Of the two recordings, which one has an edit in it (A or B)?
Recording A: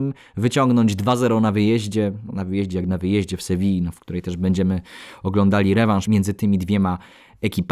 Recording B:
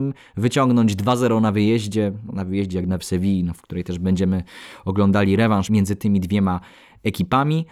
B